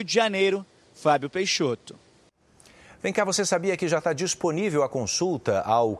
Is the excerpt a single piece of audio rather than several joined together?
yes; 0 cuts

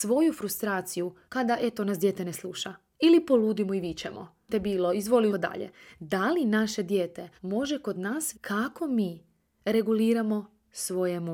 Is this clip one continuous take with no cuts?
no; 6 cuts; at 1.2 s, 2.9 s, 4.5 s, 5.3 s, 7.4 s, 8.3 s

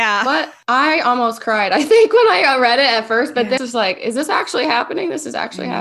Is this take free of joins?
no; 1 cut; at 3.6 s

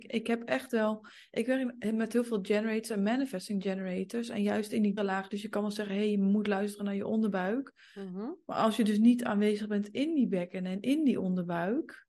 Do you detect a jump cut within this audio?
yes; 1 cut; at 5.0 s

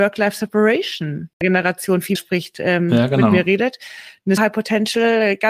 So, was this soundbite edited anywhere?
yes; 3 cuts; at 1.4 s, 2.1 s, 4.4 s

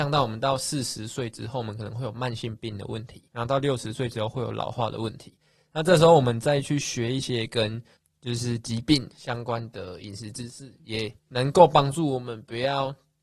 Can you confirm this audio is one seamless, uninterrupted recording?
no; 3 cuts; at 3.3 s, 8.0 s, 11.2 s

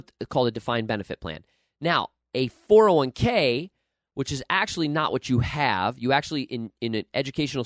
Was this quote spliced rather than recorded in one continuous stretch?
no; 0 cuts

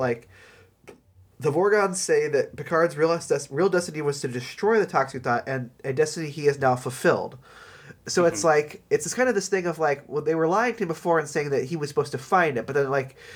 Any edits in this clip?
no; 0 cuts

